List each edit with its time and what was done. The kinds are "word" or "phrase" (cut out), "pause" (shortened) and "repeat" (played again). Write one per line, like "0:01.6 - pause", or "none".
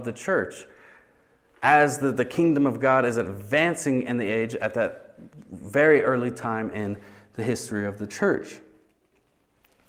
none